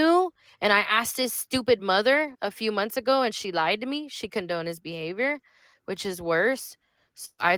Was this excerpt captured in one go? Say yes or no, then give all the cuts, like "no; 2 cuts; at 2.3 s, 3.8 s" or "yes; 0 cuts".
yes; 0 cuts